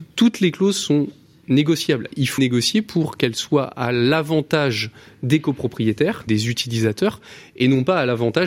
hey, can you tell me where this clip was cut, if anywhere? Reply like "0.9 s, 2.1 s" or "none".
2.4 s, 6.3 s